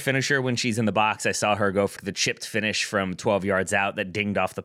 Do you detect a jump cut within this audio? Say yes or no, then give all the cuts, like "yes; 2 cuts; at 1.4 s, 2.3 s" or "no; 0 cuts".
yes; 1 cut; at 2.0 s